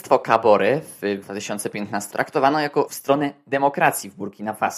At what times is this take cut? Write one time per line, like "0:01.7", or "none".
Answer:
0:01.2
0:02.1
0:02.9